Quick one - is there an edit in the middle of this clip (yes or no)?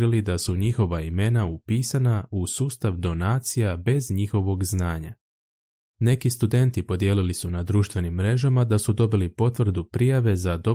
no